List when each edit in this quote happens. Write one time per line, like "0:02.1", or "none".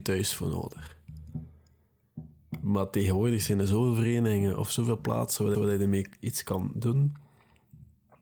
0:05.5